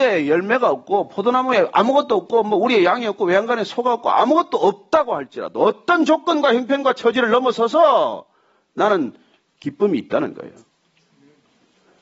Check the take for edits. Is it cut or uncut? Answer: uncut